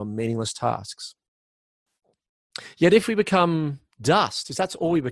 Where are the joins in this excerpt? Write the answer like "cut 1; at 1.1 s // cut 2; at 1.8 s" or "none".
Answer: cut 1; at 3.9 s